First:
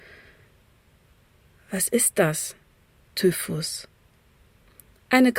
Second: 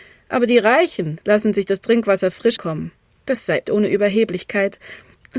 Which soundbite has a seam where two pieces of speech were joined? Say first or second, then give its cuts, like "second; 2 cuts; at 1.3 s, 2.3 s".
second; 3 cuts; at 2.6 s, 3.1 s, 3.6 s